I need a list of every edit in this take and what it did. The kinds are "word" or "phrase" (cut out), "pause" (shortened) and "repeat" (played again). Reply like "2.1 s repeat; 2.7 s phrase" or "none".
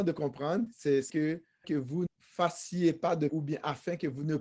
1.1 s word; 1.6 s word; 2.1 s word; 3.3 s word